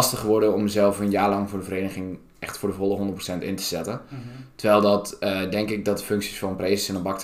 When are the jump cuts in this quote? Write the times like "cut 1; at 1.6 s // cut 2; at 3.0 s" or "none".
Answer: none